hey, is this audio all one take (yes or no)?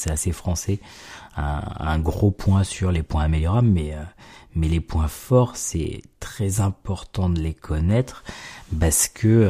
yes